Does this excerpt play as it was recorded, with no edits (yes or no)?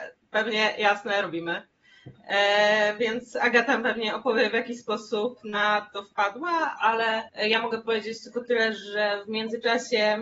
no